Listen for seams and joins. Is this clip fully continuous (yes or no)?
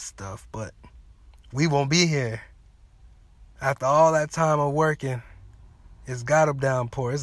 yes